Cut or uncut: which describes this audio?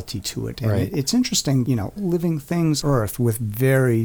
cut